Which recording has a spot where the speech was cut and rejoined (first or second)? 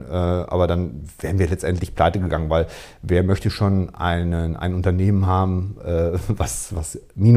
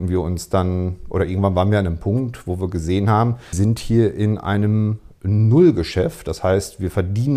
second